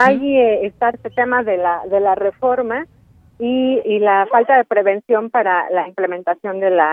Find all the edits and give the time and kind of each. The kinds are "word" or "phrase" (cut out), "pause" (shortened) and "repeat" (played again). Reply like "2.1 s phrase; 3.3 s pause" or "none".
0.9 s word; 3.8 s word